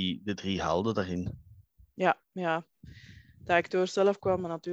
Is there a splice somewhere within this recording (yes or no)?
no